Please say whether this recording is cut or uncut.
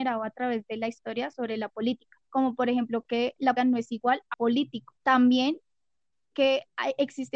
cut